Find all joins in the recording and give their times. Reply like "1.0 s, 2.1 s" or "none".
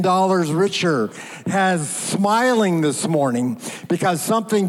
none